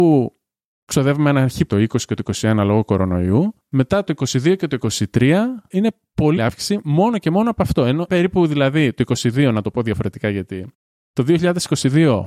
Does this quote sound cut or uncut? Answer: cut